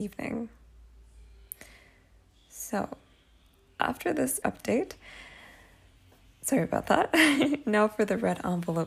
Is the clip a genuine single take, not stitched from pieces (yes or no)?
no